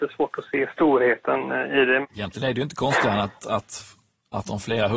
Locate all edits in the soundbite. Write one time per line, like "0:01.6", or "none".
none

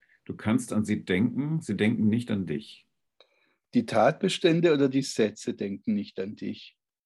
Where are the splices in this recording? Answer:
none

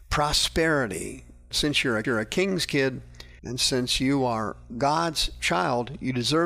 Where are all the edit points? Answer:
0:01.5
0:02.0
0:03.4
0:04.7

